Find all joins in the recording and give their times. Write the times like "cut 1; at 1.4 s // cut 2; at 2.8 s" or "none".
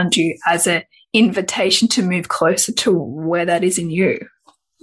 none